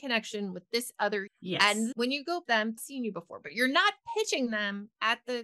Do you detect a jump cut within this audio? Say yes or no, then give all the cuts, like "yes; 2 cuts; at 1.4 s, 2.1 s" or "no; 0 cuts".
yes; 4 cuts; at 1.3 s, 1.9 s, 2.5 s, 2.8 s